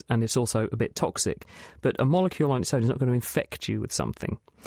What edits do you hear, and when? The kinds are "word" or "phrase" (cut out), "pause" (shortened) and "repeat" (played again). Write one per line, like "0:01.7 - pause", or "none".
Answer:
none